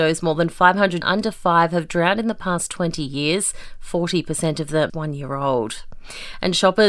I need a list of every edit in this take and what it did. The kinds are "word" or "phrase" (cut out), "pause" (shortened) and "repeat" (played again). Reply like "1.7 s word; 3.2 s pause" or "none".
1.0 s word; 4.9 s word